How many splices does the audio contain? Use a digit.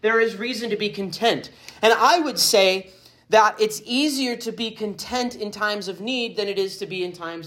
0